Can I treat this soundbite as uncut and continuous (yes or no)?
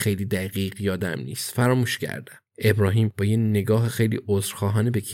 no